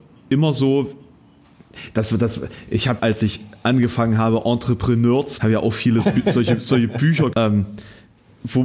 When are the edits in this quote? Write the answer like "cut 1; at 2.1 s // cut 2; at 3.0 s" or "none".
cut 1; at 3.0 s // cut 2; at 5.4 s // cut 3; at 6.0 s // cut 4; at 7.3 s